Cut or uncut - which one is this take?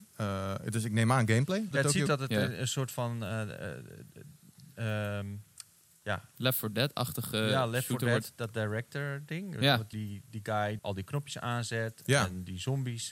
cut